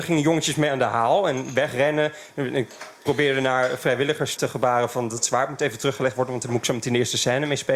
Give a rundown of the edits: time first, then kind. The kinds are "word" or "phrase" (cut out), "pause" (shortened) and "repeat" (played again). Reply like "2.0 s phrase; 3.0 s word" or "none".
4.4 s word